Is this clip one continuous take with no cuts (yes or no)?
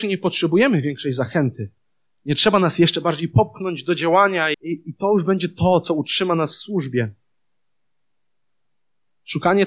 no